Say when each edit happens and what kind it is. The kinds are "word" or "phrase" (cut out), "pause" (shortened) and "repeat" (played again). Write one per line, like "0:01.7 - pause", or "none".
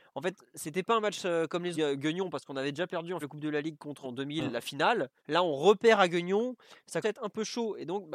0:01.7 - word
0:03.2 - word
0:04.0 - word
0:05.2 - pause
0:07.0 - word